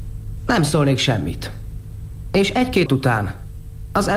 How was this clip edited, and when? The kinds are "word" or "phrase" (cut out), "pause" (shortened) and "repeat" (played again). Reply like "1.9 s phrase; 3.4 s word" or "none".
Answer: 2.9 s word